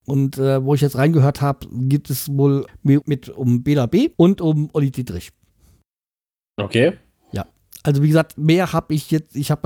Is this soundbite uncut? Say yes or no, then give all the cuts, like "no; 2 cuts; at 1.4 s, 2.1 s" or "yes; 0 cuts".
no; 3 cuts; at 2.7 s, 3.0 s, 4.1 s